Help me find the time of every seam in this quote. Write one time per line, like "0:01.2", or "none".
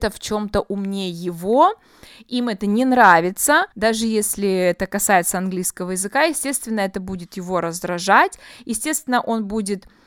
0:03.7

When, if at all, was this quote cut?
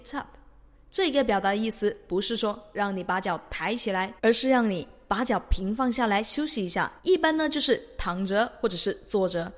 0:04.2
0:07.0

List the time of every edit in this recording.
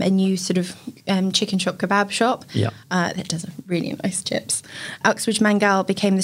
none

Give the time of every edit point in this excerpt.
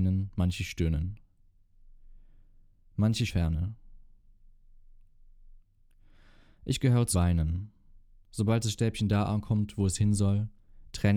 0:03.3
0:07.1

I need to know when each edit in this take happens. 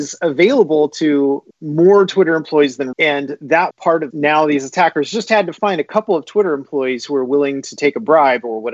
0:01.5
0:02.9
0:03.7
0:04.1

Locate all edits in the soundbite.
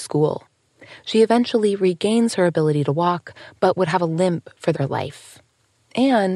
0:04.7

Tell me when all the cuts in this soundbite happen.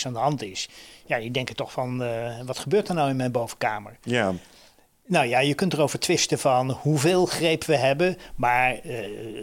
none

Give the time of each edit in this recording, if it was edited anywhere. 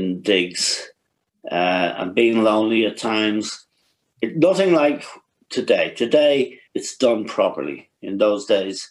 0:06.7

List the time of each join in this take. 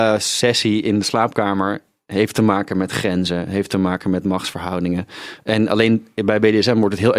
none

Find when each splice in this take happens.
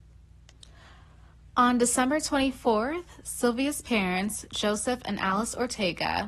none

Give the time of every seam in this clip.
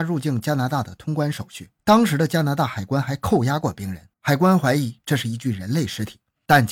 0:01.8
0:04.1

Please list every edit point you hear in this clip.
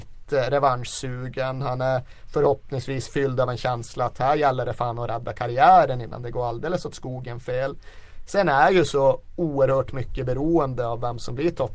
none

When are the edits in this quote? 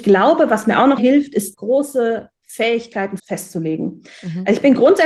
0:01.0
0:01.5
0:03.2

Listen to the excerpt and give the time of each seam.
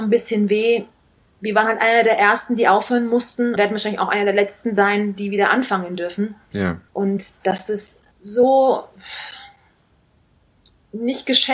0:01.1
0:03.6
0:06.9
0:08.1

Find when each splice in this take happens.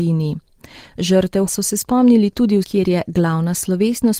0:01.5
0:02.6

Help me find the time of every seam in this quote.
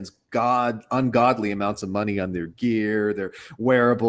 none

